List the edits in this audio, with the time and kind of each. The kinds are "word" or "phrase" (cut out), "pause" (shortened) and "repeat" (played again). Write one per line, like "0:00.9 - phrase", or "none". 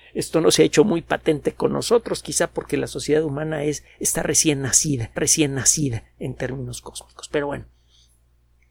0:05.2 - repeat